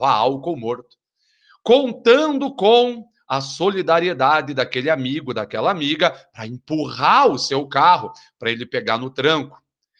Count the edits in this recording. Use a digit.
0